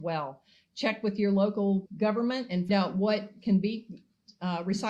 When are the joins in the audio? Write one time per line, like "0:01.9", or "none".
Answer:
0:01.9
0:02.7